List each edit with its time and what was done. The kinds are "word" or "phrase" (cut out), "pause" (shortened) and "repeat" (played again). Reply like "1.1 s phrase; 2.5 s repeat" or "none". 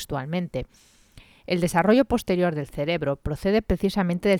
none